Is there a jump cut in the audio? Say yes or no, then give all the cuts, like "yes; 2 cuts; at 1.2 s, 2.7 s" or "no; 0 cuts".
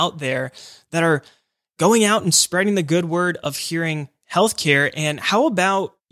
no; 0 cuts